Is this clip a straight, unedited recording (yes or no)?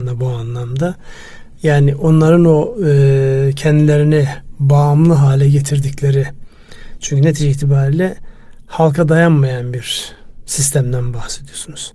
yes